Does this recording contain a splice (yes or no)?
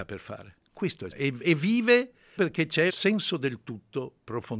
yes